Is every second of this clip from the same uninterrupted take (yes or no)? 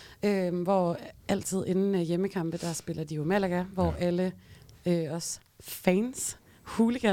yes